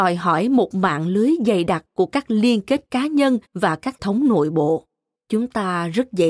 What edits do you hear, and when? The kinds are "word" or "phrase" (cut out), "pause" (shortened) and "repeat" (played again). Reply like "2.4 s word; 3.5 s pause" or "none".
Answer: 3.5 s pause; 4.0 s word; 5.2 s pause